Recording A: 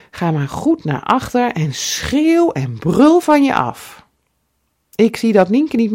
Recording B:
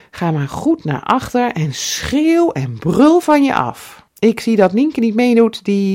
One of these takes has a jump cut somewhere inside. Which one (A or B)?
B